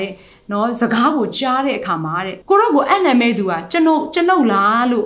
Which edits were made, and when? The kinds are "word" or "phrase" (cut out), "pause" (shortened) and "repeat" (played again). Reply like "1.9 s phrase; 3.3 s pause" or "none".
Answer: 2.4 s pause